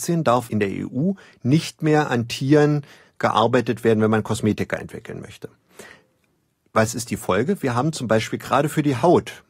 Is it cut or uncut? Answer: uncut